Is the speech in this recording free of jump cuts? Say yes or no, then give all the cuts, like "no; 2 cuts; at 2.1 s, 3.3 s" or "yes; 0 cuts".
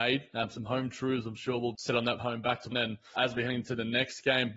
no; 4 cuts; at 1.7 s, 2.2 s, 2.7 s, 3.2 s